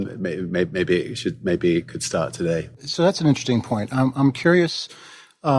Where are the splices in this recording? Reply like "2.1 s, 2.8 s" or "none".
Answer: none